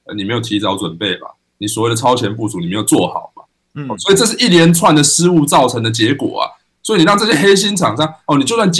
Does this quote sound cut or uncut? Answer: uncut